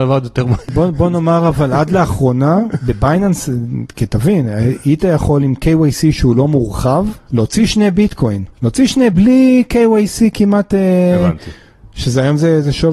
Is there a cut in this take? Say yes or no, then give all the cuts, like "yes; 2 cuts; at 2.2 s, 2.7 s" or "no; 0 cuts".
yes; 1 cut; at 9.1 s